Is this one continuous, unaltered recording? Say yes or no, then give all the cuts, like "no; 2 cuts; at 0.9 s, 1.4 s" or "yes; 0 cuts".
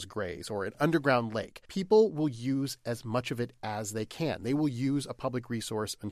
no; 1 cut; at 1.6 s